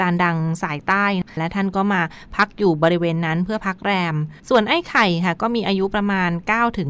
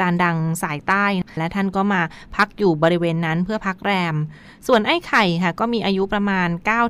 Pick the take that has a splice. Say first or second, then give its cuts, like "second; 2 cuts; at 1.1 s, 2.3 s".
first; 1 cut; at 4.4 s